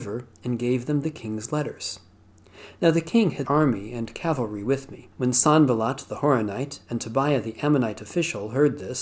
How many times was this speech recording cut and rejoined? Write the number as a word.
two